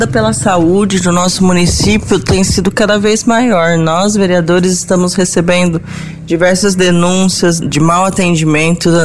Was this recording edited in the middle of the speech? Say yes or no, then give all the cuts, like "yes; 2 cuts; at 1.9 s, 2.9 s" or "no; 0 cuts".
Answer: yes; 1 cut; at 7.6 s